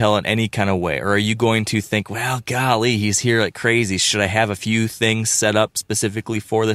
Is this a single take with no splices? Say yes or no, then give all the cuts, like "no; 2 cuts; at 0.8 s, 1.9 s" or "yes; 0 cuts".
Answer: yes; 0 cuts